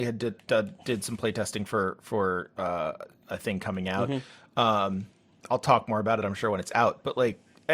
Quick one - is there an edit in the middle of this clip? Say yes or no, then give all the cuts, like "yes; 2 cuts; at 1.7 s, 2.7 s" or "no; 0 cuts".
no; 0 cuts